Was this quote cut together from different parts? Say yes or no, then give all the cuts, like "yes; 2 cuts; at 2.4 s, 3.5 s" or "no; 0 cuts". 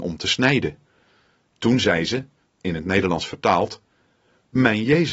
no; 0 cuts